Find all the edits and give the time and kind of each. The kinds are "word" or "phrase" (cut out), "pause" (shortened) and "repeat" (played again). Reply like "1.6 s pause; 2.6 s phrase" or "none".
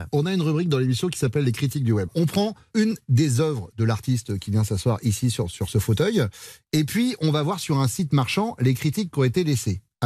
none